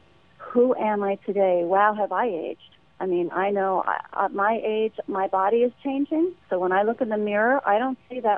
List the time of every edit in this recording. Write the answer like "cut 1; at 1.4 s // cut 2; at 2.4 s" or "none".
cut 1; at 2.9 s